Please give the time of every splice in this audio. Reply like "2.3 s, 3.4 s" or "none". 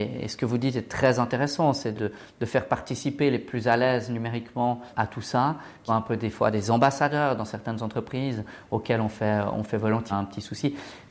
1.9 s, 5.9 s, 10.1 s